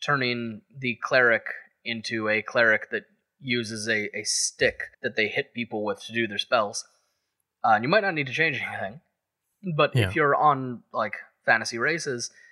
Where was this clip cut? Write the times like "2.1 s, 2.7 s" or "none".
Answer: 4.9 s